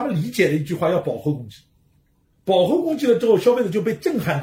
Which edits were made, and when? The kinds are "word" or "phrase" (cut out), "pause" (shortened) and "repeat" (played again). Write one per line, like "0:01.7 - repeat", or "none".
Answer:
none